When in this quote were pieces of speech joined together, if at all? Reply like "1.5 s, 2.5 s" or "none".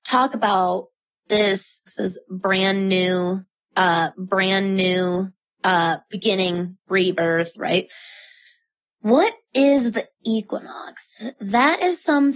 1.9 s, 4.1 s, 7.6 s